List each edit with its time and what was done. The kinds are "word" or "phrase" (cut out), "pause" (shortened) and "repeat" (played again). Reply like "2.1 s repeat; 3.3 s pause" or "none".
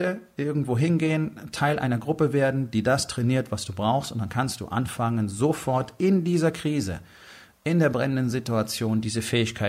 none